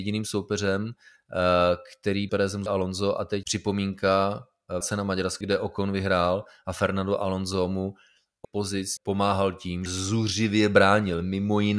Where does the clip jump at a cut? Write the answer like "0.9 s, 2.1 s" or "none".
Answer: 2.3 s, 2.7 s, 3.4 s, 4.8 s, 5.4 s, 8.4 s, 9.0 s, 9.9 s